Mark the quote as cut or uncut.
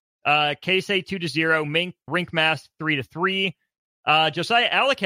cut